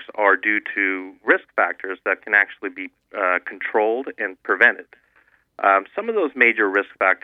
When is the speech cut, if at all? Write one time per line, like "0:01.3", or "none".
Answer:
none